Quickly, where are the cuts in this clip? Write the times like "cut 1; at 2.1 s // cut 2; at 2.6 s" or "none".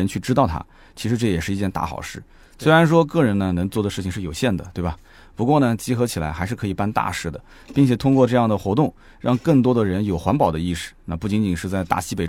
none